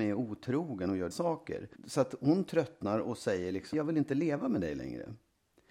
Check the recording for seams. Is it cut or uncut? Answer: cut